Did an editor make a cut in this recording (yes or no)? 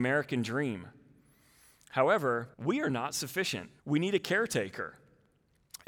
yes